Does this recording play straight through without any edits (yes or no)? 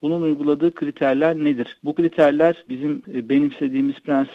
no